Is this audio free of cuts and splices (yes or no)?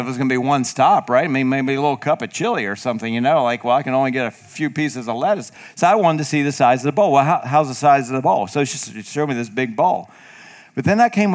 yes